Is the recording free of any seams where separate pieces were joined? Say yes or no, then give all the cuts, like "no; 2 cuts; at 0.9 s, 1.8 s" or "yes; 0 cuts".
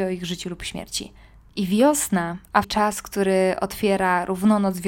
no; 1 cut; at 2.6 s